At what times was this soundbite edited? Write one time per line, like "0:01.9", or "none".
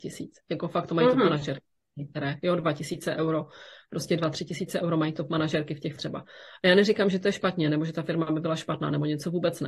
0:06.0